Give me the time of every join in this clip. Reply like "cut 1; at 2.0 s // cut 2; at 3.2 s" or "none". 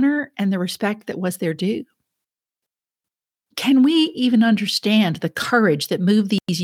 none

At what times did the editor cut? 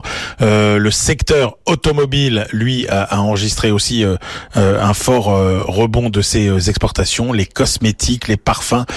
none

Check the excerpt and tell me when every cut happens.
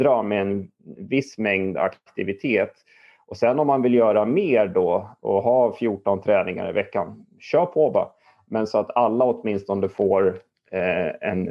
none

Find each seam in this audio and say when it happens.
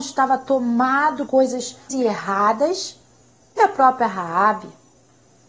cut 1; at 1.3 s // cut 2; at 1.9 s // cut 3; at 3.6 s

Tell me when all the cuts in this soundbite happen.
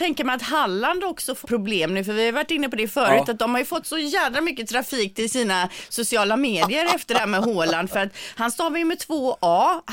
cut 1; at 1.4 s

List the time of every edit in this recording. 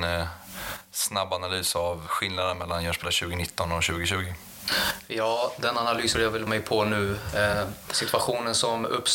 cut 1; at 2.1 s // cut 2; at 3.0 s // cut 3; at 6.1 s // cut 4; at 6.5 s

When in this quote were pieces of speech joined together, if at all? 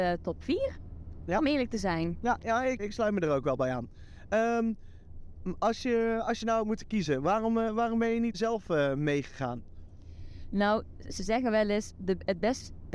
cut 1; at 2.8 s // cut 2; at 8.3 s

